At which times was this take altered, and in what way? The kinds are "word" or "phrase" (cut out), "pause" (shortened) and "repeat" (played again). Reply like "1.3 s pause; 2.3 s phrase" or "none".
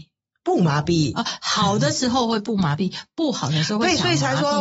1.4 s word